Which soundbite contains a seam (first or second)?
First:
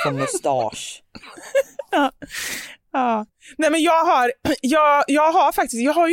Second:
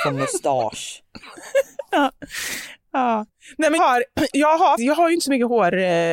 second